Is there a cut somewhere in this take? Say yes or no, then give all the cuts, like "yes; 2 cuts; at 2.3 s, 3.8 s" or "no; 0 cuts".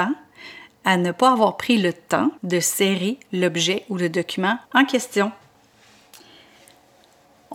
yes; 2 cuts; at 2.4 s, 4.6 s